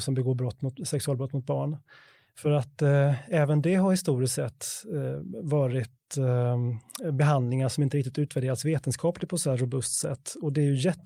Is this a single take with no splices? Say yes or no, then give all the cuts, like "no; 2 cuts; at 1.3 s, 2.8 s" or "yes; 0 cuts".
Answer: yes; 0 cuts